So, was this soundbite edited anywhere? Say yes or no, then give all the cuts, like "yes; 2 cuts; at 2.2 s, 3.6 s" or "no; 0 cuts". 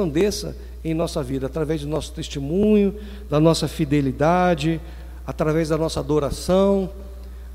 no; 0 cuts